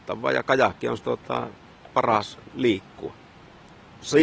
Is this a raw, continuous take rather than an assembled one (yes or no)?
no